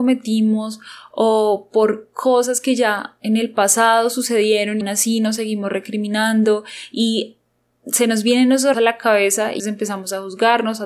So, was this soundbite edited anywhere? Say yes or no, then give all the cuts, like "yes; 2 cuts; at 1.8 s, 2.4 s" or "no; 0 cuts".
yes; 3 cuts; at 4.8 s, 8.7 s, 9.6 s